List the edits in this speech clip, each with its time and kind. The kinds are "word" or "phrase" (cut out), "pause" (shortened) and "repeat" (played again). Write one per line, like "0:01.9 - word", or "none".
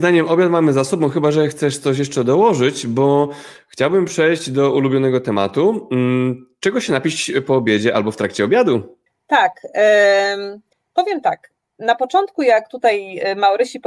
none